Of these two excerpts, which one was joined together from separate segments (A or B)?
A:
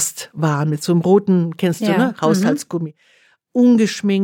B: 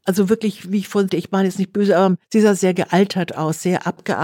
B